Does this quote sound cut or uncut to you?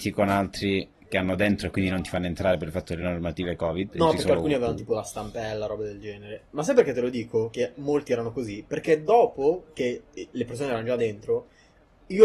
uncut